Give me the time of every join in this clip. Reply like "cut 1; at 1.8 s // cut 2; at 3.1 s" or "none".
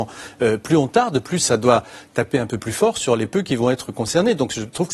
none